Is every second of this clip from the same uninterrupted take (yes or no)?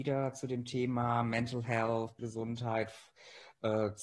no